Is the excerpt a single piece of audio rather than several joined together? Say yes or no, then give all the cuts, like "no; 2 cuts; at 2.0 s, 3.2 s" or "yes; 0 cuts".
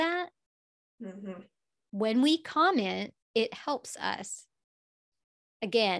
no; 1 cut; at 3.2 s